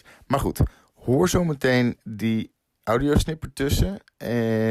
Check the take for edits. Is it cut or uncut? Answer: uncut